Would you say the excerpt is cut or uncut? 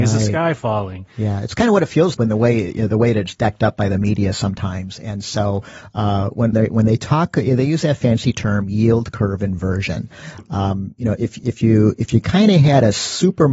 cut